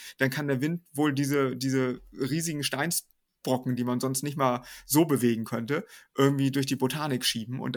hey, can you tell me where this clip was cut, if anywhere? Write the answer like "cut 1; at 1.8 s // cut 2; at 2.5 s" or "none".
none